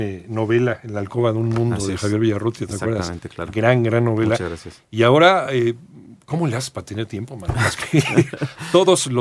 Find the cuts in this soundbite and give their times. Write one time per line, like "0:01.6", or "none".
none